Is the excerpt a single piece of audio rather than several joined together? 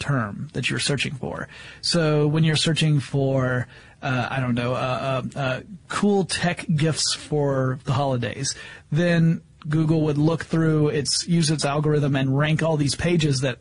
yes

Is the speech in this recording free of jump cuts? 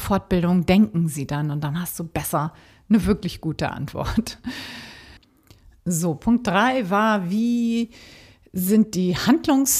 yes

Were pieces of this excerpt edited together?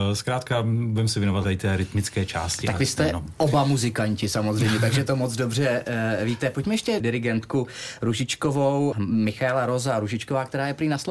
yes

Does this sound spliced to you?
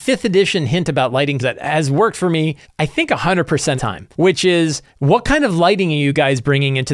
yes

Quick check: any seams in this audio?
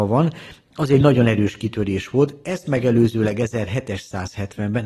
no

